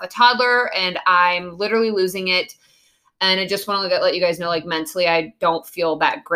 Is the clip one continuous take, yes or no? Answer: yes